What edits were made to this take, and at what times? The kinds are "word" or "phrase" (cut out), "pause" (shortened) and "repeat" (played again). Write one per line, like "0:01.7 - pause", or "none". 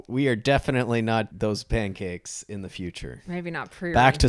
0:01.3 - word